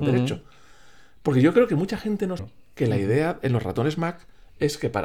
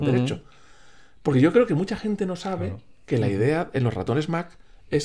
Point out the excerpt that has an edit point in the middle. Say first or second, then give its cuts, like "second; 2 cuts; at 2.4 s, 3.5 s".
first; 1 cut; at 2.4 s